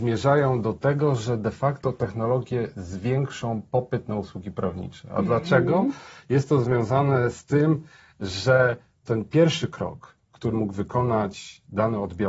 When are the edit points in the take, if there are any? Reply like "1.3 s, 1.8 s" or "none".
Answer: 10.5 s